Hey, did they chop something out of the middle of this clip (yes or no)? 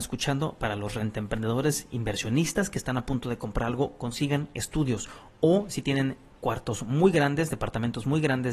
no